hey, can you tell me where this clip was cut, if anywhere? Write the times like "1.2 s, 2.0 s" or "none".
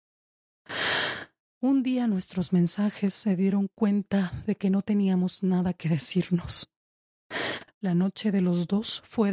none